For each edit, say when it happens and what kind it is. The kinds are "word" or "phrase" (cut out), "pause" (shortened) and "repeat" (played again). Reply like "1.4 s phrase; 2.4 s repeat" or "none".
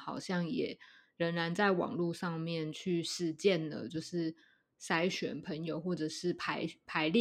none